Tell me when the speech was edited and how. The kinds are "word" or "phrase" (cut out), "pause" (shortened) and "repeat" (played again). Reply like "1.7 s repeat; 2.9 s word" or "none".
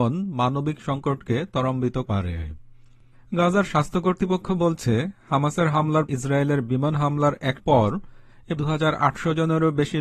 2.1 s word; 6.1 s word; 7.6 s word; 8.6 s word